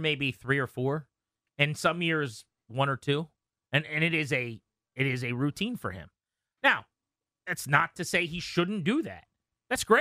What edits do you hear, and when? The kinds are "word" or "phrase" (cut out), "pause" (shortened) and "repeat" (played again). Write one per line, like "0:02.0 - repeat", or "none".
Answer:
none